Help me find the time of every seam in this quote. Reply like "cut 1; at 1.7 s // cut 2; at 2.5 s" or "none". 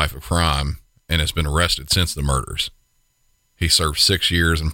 none